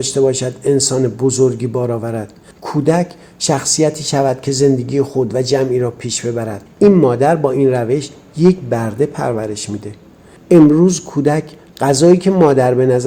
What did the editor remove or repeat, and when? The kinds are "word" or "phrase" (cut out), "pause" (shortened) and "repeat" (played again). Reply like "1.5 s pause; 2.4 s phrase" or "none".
none